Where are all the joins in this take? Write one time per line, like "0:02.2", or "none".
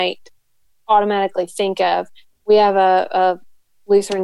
none